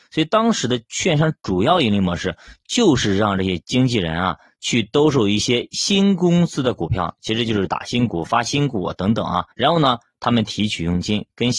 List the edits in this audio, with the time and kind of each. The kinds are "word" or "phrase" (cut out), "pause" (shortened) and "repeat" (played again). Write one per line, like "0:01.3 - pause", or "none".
0:09.5 - pause